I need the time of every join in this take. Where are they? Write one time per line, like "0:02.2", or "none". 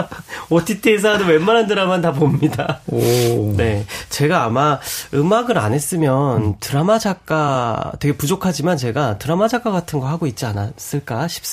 none